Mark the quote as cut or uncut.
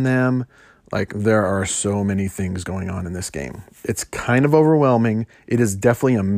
uncut